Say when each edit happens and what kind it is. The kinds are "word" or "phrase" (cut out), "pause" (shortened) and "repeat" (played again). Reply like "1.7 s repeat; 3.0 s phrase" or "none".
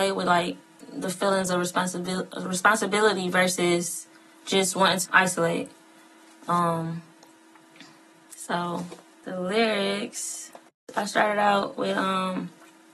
5.1 s word